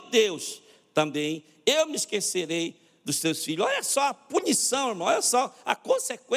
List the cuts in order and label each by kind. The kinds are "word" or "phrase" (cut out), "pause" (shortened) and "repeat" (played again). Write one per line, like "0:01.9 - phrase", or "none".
none

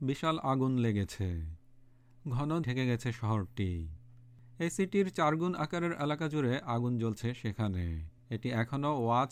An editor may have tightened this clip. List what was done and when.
0:02.6 - word
0:08.2 - pause

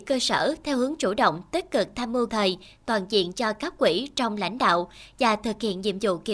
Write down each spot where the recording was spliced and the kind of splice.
0:02.3 - word

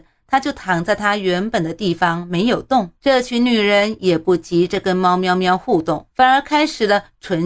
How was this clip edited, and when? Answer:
0:03.0 - pause
0:06.1 - pause

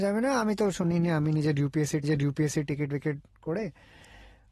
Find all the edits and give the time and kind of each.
0:02.0 - repeat

